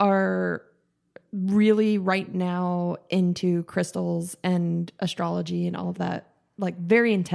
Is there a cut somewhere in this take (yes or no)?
no